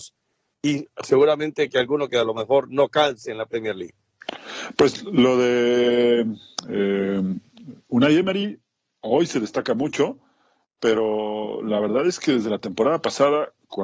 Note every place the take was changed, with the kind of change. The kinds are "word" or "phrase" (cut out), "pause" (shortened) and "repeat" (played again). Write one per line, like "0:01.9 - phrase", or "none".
none